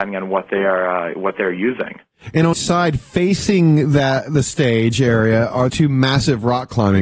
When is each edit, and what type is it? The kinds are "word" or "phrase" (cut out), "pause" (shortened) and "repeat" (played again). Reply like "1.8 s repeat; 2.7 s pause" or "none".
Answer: 2.5 s word; 5.7 s word